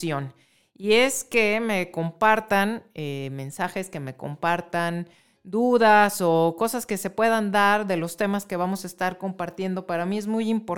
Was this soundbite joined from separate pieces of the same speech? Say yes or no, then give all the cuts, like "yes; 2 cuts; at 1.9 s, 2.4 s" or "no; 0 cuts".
no; 0 cuts